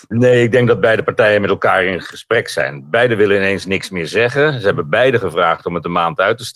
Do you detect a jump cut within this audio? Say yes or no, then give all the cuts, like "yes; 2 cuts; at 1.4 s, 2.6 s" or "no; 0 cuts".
no; 0 cuts